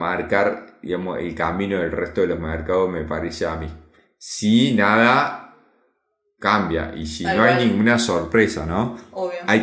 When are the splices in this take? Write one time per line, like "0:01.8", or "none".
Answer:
none